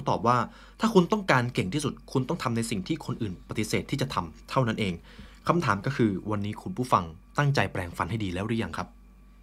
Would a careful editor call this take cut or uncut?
cut